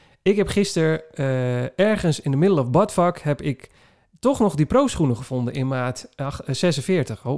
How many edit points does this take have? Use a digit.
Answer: 0